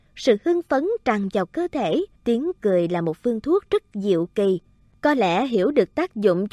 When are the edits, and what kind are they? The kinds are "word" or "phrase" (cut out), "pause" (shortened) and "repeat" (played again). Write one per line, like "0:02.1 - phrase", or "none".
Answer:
0:02.2 - pause
0:04.9 - pause

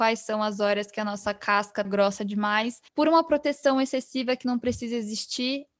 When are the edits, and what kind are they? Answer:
0:01.8 - word
0:02.9 - pause

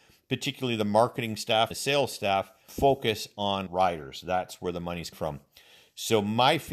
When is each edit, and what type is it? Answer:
0:01.7 - word
0:02.7 - word
0:03.7 - word
0:05.1 - word

